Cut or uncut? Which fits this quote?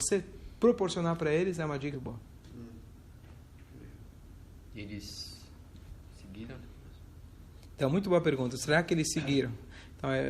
cut